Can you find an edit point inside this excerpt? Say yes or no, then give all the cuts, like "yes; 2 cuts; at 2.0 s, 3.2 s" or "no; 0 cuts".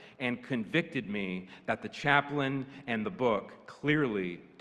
no; 0 cuts